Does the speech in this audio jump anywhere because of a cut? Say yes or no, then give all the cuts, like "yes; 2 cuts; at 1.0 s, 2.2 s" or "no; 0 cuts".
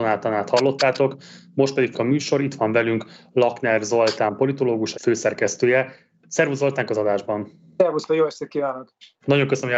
yes; 4 cuts; at 1.9 s, 4.9 s, 6.9 s, 8.1 s